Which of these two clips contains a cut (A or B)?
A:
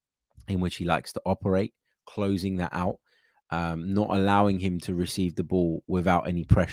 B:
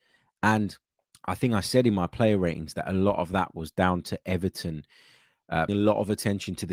B